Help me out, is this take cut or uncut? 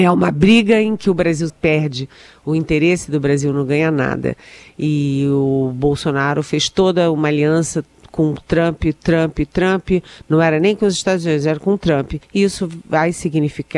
cut